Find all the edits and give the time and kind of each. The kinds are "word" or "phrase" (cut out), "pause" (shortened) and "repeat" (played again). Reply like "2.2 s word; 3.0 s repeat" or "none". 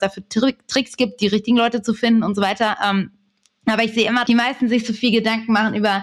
4.2 s word